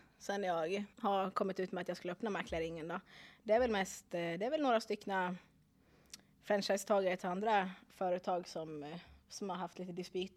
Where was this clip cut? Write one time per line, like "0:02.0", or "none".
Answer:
0:00.9